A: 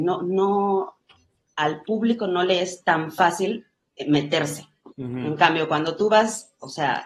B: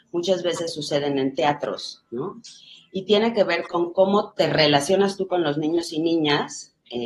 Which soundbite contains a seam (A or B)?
A